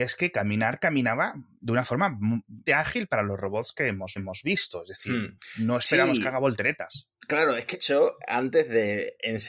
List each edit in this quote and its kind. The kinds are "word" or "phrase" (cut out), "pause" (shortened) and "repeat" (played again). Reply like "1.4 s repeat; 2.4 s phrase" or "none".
2.7 s word; 4.2 s repeat; 7.7 s word